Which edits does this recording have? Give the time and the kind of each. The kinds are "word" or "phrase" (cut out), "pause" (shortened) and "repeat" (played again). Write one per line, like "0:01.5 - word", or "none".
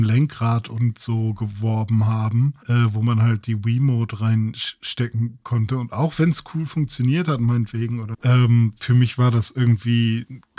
0:02.6 - pause
0:08.1 - word